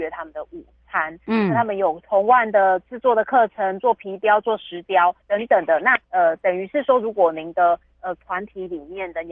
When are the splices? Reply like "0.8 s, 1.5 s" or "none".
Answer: 5.2 s, 6.0 s